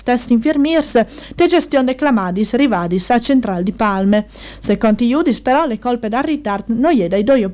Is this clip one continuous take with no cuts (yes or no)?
yes